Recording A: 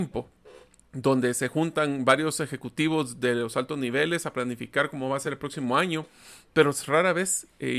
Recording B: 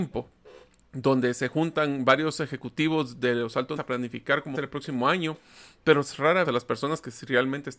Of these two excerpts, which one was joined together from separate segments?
B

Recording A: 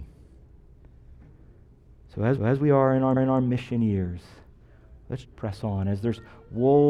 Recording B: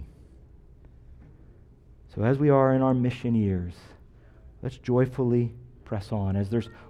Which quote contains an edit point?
A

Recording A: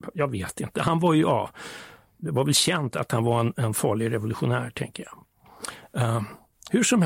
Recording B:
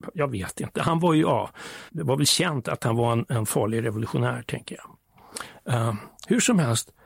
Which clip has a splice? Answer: B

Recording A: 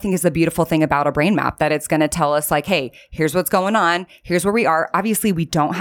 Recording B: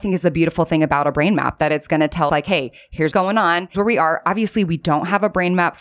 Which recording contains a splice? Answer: B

